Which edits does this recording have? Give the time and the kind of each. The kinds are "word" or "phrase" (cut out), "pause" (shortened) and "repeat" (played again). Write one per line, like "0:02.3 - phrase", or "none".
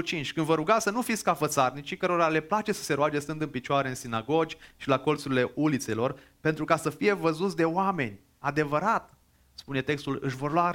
none